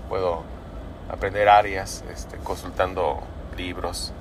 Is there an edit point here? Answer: no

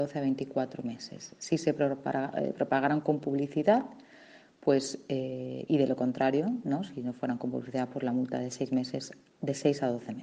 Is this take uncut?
yes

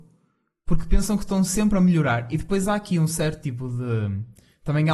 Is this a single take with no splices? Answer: yes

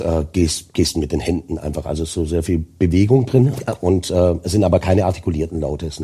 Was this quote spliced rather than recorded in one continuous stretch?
no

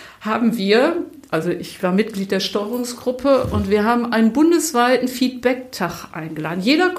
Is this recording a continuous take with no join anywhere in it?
yes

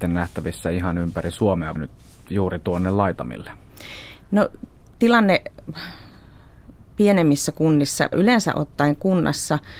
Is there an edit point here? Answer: yes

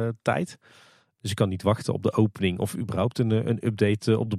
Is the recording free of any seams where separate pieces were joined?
yes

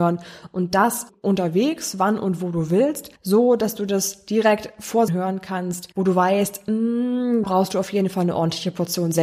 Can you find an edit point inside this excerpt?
yes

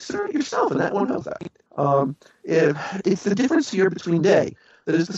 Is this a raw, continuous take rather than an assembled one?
no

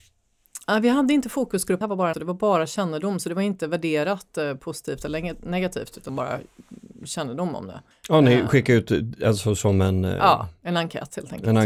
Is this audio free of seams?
no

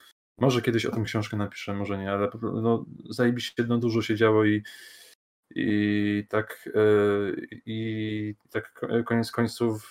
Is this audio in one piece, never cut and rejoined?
yes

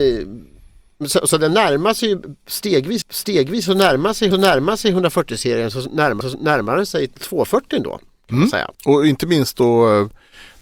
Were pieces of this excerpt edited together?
yes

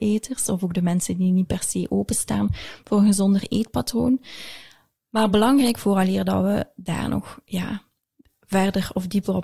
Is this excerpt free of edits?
yes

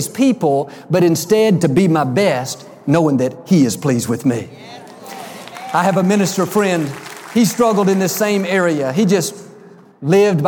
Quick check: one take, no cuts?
yes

